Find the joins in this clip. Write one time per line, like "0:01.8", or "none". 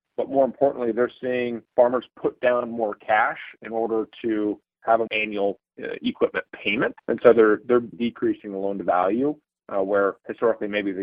0:01.7
0:05.1
0:07.0
0:07.9